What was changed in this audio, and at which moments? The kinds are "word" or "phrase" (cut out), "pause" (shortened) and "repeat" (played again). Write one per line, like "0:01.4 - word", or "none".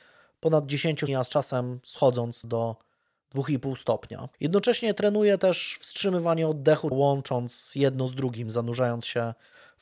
0:01.1 - word
0:02.4 - word
0:04.3 - pause
0:06.9 - word